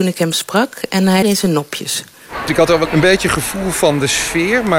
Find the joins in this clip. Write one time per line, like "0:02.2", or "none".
0:01.2
0:02.9